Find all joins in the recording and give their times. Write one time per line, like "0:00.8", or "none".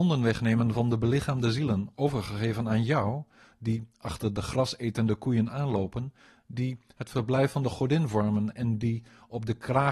none